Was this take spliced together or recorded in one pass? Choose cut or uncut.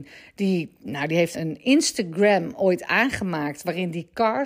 cut